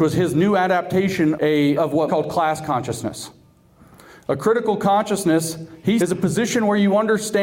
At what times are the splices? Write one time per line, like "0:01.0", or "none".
0:01.3
0:01.8
0:02.1
0:06.0